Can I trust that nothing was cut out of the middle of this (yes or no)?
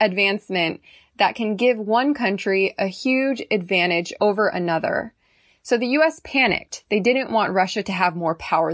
yes